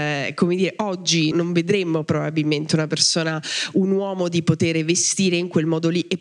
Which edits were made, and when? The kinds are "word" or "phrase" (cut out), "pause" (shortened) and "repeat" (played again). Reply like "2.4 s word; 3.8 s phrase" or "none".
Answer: 1.3 s word